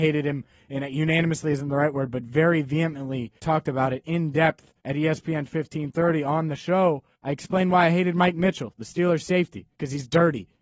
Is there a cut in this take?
yes; 4 cuts; at 3.4 s, 4.8 s, 7.1 s, 9.7 s

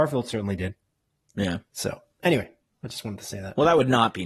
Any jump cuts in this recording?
no; 0 cuts

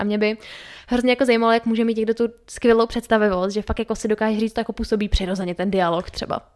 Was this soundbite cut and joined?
yes; 1 cut; at 4.5 s

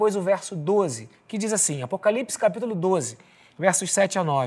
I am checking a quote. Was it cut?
no; 0 cuts

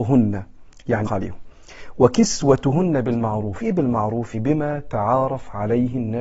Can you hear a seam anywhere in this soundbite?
yes; 3 cuts; at 1.1 s, 3.6 s, 4.3 s

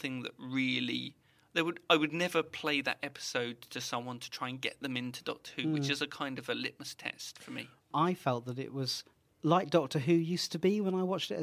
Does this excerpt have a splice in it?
no; 0 cuts

